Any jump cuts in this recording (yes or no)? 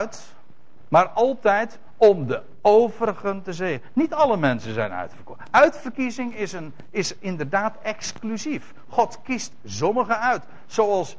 no